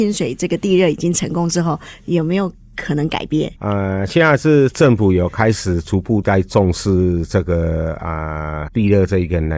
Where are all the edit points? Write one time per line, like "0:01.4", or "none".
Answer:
0:03.6
0:08.7

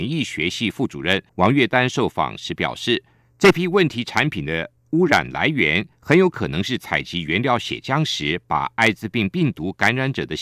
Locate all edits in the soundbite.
0:01.3
0:03.2

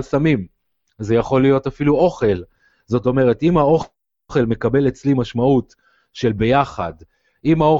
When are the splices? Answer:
none

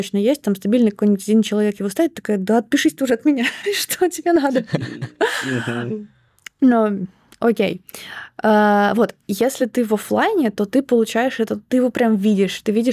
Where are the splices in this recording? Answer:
none

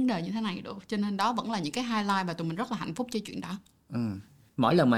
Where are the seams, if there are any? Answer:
none

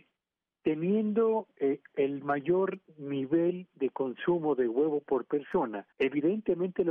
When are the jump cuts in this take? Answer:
0:05.9

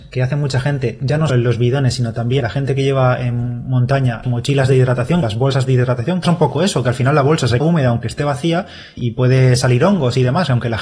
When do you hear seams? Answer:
0:01.3
0:02.4
0:04.2
0:05.2
0:06.2
0:07.6
0:09.0

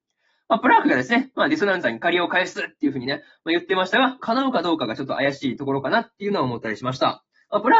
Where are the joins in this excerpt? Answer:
0:04.2

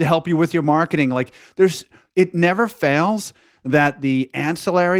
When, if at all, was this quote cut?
none

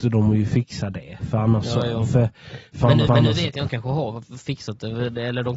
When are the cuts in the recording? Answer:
0:03.1
0:03.7

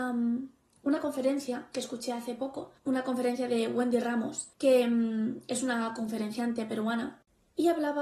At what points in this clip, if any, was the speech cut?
0:02.8
0:04.5

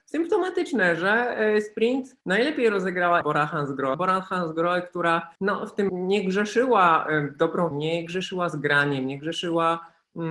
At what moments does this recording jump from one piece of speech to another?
0:02.2
0:03.2
0:03.9
0:05.4
0:05.9
0:07.7

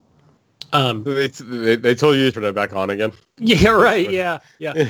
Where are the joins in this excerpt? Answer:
0:02.3

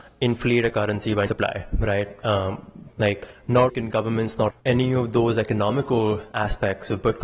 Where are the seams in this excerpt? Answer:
0:01.3
0:02.9
0:03.7
0:04.5

